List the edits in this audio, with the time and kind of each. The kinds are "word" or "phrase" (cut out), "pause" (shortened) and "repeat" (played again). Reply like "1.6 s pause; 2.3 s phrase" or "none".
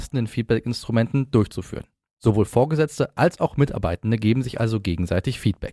2.1 s pause